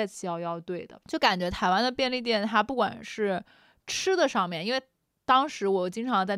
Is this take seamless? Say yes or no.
no